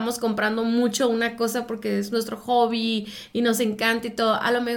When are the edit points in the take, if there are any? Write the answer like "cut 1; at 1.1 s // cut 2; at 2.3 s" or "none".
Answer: none